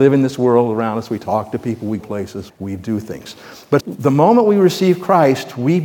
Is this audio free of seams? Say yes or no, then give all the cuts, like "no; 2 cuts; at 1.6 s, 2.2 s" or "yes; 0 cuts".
no; 3 cuts; at 2.0 s, 2.5 s, 3.8 s